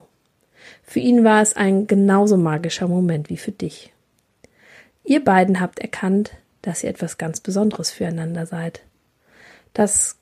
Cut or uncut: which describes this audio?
uncut